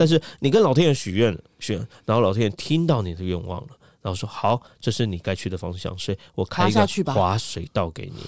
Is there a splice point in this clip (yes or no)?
no